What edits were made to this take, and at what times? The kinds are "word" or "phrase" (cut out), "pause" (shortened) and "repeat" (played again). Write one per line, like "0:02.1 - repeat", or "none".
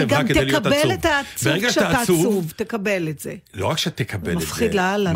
0:03.5 - pause